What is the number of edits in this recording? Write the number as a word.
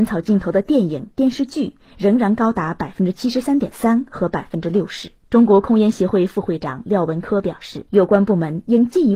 two